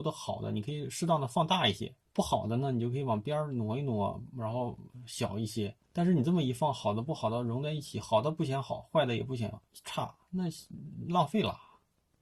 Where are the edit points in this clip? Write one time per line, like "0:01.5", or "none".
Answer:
0:02.0
0:05.8
0:09.7